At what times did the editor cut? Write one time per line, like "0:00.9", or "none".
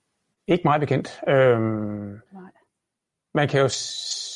0:02.3